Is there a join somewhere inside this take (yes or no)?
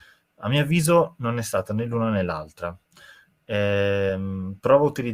no